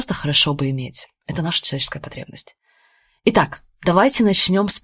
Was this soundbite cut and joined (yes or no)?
no